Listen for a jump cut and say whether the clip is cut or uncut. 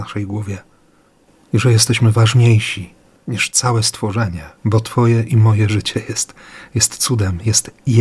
cut